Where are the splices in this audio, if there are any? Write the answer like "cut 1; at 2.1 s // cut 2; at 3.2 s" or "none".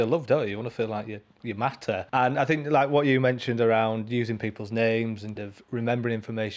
cut 1; at 2.1 s // cut 2; at 5.4 s